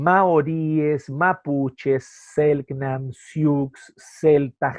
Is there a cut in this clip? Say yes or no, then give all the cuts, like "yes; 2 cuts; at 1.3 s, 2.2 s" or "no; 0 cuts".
no; 0 cuts